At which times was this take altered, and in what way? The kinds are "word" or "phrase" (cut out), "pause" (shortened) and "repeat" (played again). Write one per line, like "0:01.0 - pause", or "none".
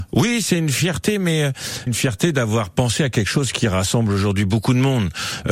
0:01.9 - word